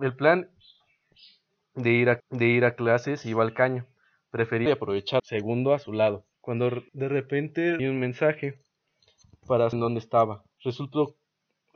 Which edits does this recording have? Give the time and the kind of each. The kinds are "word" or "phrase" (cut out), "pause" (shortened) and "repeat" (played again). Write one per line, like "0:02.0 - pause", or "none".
0:02.2 - repeat
0:04.7 - word
0:05.2 - phrase
0:06.3 - pause
0:06.9 - pause
0:07.8 - word
0:09.7 - word
0:10.5 - pause